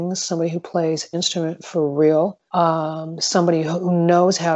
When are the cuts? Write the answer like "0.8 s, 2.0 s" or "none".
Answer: 1.1 s, 2.5 s